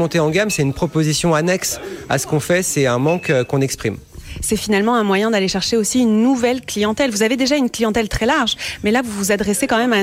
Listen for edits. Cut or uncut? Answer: uncut